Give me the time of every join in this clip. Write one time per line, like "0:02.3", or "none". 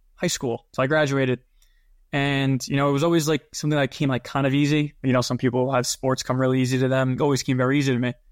0:07.2